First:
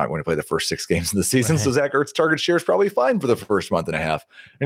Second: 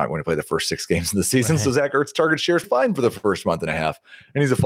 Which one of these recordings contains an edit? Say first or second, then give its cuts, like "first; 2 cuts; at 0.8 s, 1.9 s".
second; 1 cut; at 2.6 s